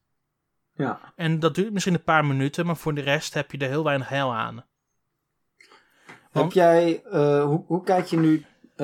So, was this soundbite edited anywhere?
no; 0 cuts

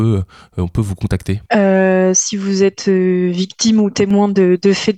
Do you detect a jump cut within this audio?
yes; 1 cut; at 1.5 s

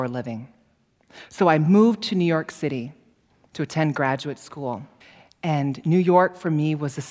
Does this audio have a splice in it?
yes; 1 cut; at 5.0 s

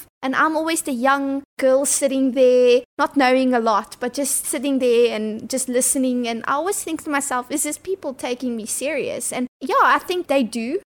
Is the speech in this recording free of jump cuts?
yes; 0 cuts

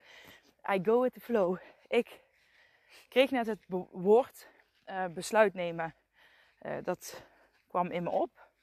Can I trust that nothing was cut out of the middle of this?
yes; 0 cuts

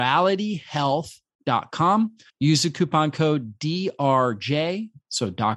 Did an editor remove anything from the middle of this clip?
yes; 1 cut; at 2.3 s

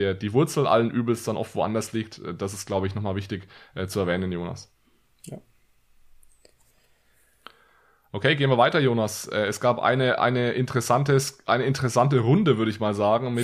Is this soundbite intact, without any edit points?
yes; 0 cuts

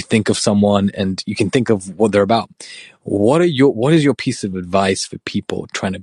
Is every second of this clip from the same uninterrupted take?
yes; 0 cuts

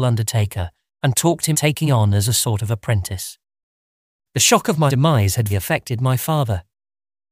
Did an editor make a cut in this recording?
yes; 4 cuts; at 1.5 s, 1.9 s, 4.9 s, 5.5 s

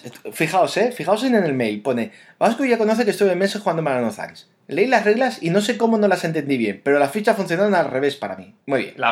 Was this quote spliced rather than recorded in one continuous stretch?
no; 0 cuts

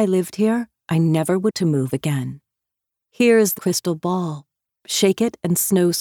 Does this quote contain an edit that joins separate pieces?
yes; 2 cuts; at 1.5 s, 3.6 s

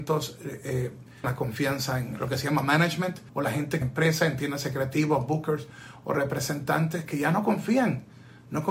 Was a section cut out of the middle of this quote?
yes; 3 cuts; at 1.2 s, 3.3 s, 3.8 s

